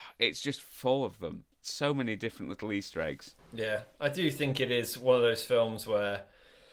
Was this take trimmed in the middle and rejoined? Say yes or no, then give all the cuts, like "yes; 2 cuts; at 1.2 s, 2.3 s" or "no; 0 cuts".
yes; 2 cuts; at 1.5 s, 3.4 s